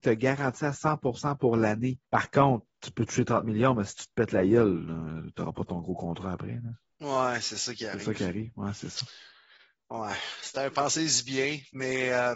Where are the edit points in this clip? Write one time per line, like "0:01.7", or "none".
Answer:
0:02.0
0:02.7